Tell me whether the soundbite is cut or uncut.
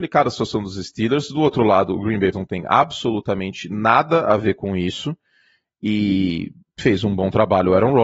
cut